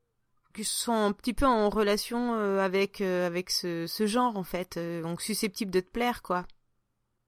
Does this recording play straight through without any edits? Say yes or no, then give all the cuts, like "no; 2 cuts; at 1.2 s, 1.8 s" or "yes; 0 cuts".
yes; 0 cuts